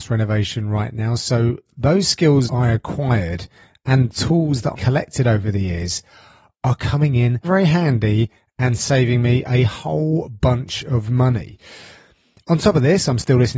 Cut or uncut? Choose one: cut